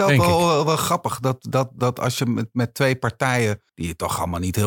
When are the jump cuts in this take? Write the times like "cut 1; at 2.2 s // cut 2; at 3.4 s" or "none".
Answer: cut 1; at 3.7 s